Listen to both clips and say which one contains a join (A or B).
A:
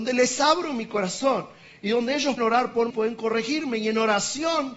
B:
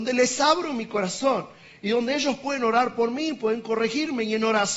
A